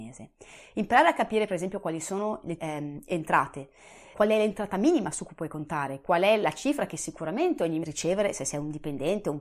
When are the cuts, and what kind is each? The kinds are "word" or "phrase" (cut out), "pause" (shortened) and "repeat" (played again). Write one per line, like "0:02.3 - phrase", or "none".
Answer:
0:02.6 - word
0:04.1 - word
0:06.0 - word
0:07.8 - phrase